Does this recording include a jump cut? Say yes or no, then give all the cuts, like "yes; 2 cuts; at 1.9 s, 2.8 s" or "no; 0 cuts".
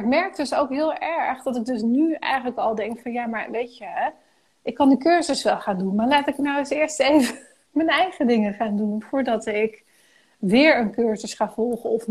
no; 0 cuts